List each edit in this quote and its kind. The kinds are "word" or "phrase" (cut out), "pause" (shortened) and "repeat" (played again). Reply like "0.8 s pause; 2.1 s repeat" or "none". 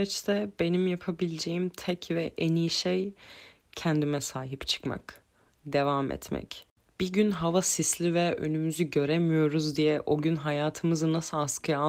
none